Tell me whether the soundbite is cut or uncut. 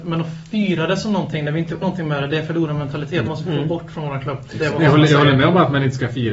cut